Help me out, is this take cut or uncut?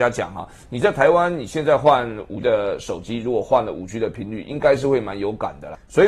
cut